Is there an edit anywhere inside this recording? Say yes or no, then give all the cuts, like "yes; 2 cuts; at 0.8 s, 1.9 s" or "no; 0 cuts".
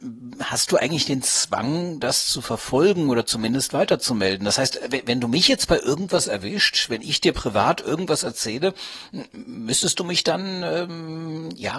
no; 0 cuts